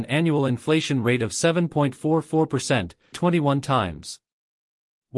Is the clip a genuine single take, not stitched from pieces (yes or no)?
no